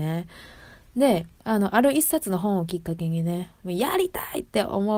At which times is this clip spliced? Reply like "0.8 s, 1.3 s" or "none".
1.3 s